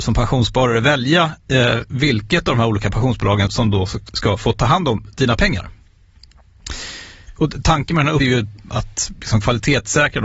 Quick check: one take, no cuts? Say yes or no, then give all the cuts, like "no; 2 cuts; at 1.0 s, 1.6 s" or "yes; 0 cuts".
no; 2 cuts; at 3.5 s, 8.2 s